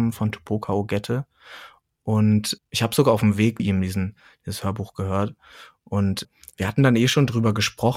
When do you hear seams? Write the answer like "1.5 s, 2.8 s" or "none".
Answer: 2.6 s, 3.6 s, 6.2 s